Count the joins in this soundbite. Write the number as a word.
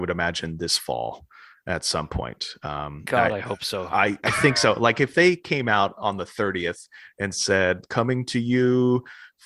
zero